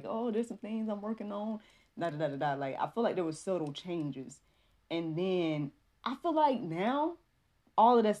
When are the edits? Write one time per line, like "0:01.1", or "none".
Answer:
none